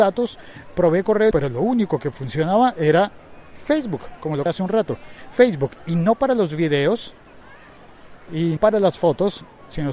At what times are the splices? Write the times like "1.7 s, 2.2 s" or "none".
1.3 s, 4.5 s, 8.6 s

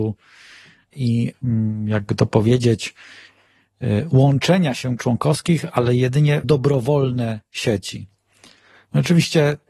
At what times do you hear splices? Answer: 0.9 s, 5.0 s, 6.4 s

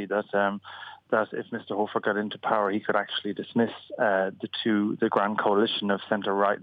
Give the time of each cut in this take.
none

